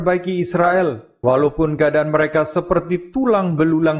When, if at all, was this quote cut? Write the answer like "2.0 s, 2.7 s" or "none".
none